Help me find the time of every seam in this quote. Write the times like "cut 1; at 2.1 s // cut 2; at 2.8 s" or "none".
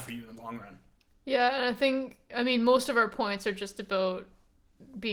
none